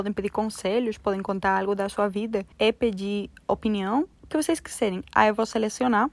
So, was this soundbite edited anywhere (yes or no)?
yes